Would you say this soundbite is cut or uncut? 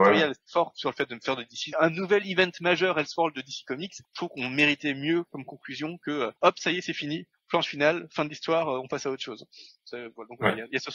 cut